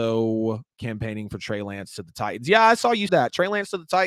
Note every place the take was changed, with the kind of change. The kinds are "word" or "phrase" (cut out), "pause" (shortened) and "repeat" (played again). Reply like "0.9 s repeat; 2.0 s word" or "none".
3.1 s word